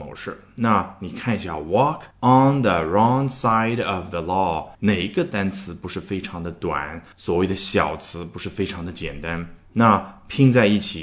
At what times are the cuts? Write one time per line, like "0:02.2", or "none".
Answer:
0:02.1
0:04.7
0:07.1